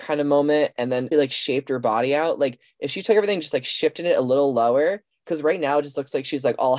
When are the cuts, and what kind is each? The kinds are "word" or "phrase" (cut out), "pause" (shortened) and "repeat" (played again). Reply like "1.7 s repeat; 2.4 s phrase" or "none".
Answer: 1.1 s word